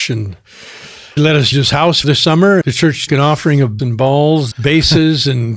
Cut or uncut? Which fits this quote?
cut